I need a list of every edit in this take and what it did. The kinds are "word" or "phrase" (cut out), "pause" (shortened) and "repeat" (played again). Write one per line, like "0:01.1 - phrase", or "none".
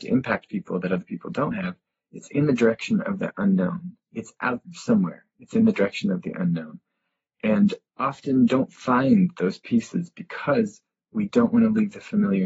0:04.0 - pause
0:04.6 - word
0:07.9 - word